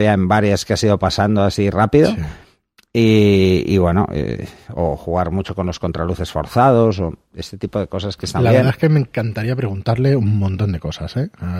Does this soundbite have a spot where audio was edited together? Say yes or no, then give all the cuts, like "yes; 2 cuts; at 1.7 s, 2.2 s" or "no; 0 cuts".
no; 0 cuts